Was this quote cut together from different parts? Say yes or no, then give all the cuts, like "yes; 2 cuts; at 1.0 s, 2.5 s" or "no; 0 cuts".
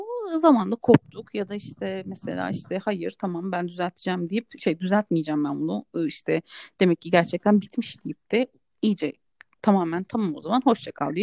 no; 0 cuts